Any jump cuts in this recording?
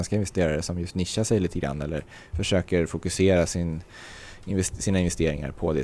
no; 0 cuts

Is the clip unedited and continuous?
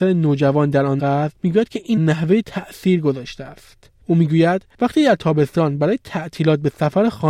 no; 3 cuts; at 1.0 s, 2.0 s, 2.4 s

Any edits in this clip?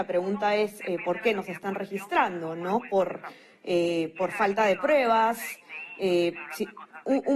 no; 0 cuts

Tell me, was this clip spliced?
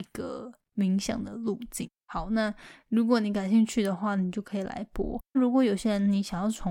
yes; 2 cuts; at 2.0 s, 5.3 s

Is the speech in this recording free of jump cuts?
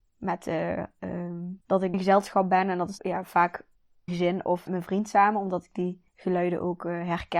no; 6 cuts; at 1.6 s, 1.9 s, 3.0 s, 4.1 s, 4.7 s, 6.1 s

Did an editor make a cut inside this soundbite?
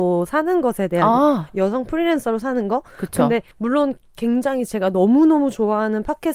yes; 1 cut; at 3.5 s

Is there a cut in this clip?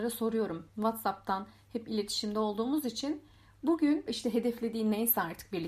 no; 0 cuts

